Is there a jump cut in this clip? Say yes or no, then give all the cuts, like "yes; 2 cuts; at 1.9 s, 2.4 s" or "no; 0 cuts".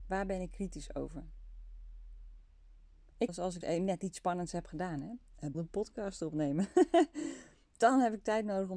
yes; 3 cuts; at 3.3 s, 3.6 s, 5.5 s